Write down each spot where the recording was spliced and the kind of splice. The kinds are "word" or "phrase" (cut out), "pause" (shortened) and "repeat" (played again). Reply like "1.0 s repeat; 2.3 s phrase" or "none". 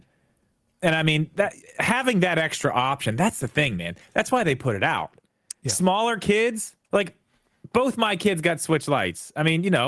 6.8 s pause